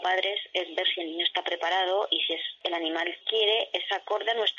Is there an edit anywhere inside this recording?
yes; 1 cut; at 3.2 s

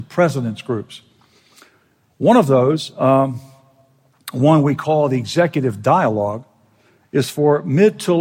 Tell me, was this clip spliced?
no; 0 cuts

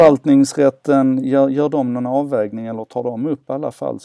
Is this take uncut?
yes; 0 cuts

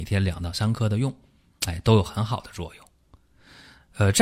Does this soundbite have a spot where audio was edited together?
no; 0 cuts

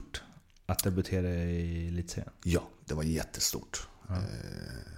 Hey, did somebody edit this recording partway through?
no; 0 cuts

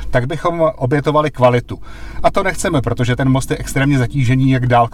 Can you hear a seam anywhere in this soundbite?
yes; 1 cut; at 3.2 s

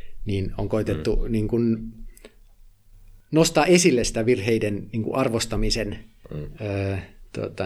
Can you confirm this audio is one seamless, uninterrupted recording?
yes; 0 cuts

